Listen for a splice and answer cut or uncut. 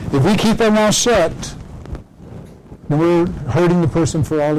uncut